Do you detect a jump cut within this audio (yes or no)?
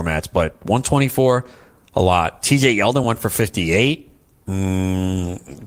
no